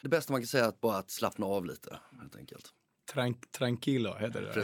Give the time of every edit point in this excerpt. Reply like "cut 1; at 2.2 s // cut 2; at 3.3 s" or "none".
none